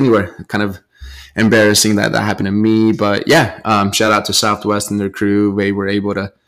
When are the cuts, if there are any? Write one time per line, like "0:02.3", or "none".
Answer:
none